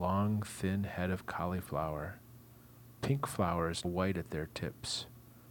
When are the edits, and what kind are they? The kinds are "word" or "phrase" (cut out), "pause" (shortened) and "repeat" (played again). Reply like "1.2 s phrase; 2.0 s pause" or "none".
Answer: 3.8 s word